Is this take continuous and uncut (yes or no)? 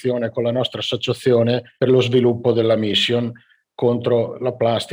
no